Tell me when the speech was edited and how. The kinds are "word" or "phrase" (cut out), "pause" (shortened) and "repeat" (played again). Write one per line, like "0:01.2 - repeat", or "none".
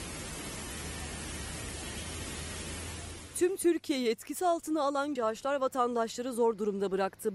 0:05.2 - word

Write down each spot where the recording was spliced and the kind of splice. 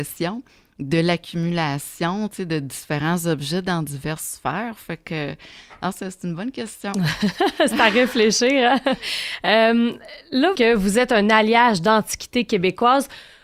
0:10.5 - phrase

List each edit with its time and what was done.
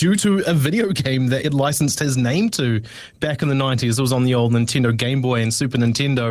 0:01.4 - word

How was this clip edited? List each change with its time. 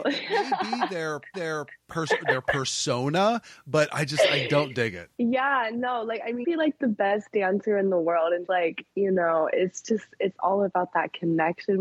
0:01.3 - repeat
0:05.1 - pause
0:06.4 - phrase
0:08.5 - word

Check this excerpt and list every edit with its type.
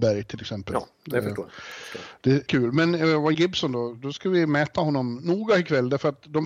0:02.5 - phrase
0:03.3 - word

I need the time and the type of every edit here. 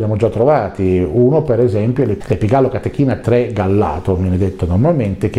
none

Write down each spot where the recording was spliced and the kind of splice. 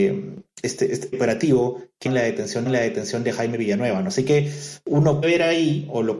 0:01.1 - word
0:02.1 - word
0:02.7 - repeat
0:05.2 - word

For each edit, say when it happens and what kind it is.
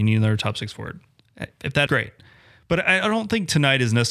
0:01.9 - word

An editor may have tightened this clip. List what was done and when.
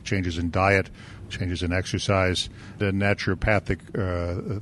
0:02.8 - phrase

